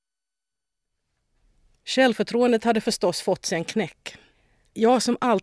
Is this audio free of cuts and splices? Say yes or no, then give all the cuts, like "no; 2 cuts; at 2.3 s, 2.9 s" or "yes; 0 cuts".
yes; 0 cuts